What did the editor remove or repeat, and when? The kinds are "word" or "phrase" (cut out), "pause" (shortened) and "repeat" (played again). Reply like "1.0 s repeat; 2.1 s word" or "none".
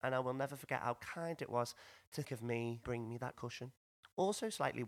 2.2 s word; 2.8 s word; 3.3 s word